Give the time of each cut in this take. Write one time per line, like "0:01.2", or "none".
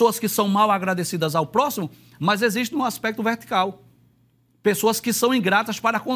none